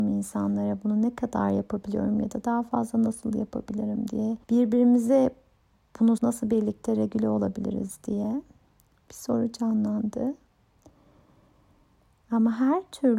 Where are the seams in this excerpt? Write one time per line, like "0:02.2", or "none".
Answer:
0:04.4
0:06.2